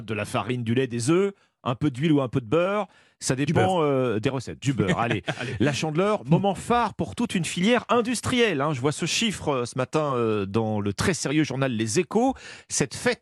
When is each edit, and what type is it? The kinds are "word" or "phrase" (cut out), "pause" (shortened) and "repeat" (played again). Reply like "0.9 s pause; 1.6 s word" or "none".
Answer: none